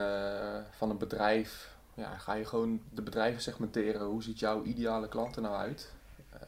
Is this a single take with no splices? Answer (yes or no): yes